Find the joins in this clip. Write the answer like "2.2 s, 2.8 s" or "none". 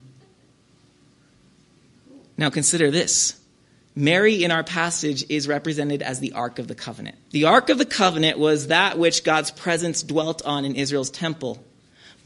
7.3 s